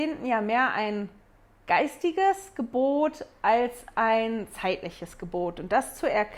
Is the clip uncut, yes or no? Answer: yes